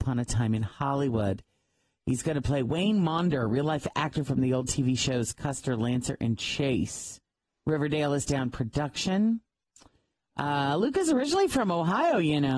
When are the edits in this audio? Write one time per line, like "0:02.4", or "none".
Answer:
0:07.5
0:08.3